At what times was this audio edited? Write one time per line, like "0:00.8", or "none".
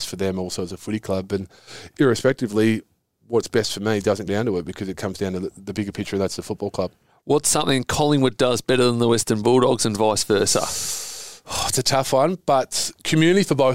0:04.3